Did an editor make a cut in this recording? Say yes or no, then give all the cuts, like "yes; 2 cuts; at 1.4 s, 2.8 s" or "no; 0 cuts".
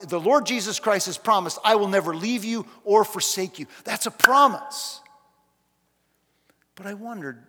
no; 0 cuts